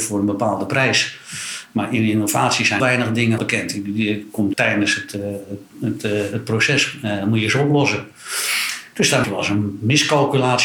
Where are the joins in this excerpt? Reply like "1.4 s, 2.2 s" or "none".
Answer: 2.8 s, 3.4 s, 4.5 s, 9.2 s